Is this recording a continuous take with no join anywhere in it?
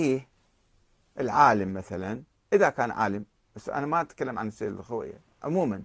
yes; 0 cuts

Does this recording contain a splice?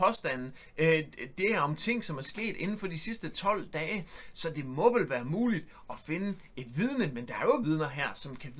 yes; 1 cut; at 7.6 s

